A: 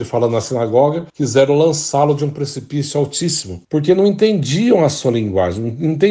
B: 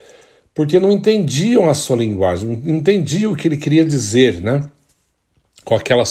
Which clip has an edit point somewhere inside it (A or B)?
A